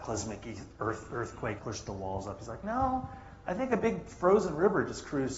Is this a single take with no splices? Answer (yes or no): no